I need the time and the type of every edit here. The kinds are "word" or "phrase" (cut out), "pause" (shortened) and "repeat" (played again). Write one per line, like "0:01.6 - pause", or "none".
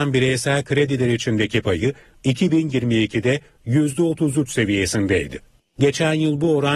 none